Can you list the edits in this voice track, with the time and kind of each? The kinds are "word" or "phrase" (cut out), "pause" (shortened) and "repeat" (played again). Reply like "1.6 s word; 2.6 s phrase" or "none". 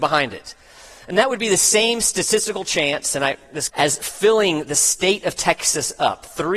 3.7 s phrase

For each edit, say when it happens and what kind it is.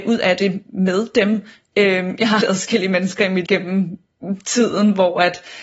2.4 s word; 3.5 s word

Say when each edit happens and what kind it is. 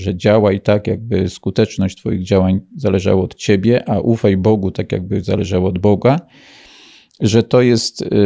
none

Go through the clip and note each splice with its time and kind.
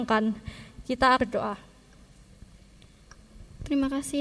1.2 s word

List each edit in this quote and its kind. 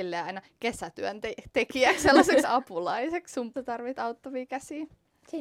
2.4 s word; 3.5 s phrase

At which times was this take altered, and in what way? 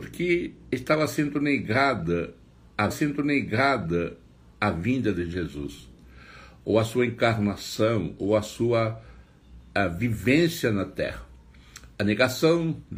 2.9 s repeat

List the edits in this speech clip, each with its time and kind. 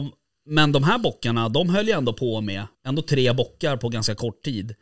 2.7 s pause

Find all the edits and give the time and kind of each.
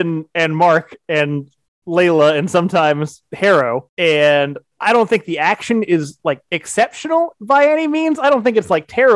none

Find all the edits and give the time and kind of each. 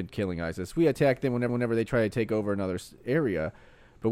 1.5 s repeat

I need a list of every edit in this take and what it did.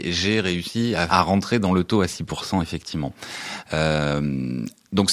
1.1 s word

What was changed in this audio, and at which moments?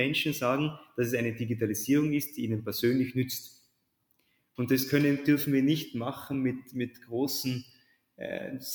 none

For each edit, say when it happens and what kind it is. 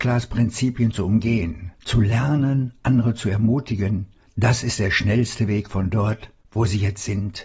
1.8 s pause; 4.2 s pause; 6.4 s pause

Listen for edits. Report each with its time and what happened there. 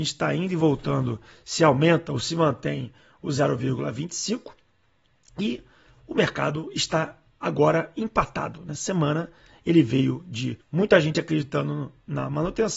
10.6 s pause

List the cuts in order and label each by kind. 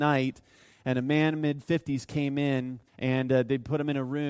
2.9 s pause

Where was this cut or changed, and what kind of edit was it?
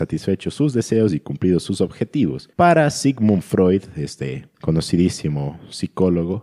2.5 s pause; 4.5 s pause

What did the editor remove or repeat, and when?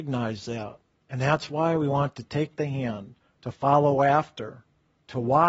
none

